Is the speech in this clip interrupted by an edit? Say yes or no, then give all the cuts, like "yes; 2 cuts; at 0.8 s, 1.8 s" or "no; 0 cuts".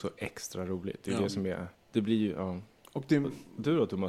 yes; 1 cut; at 1.7 s